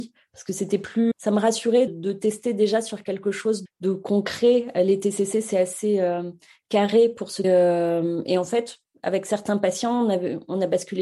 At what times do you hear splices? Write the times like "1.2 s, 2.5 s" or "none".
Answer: 1.1 s, 1.9 s, 3.7 s, 7.4 s